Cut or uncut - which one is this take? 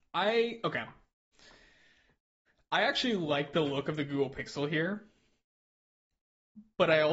uncut